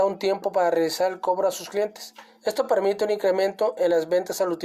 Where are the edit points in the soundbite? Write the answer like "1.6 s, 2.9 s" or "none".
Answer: none